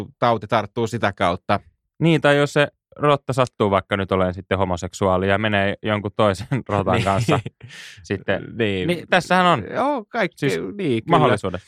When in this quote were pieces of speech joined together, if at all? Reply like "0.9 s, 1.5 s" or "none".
none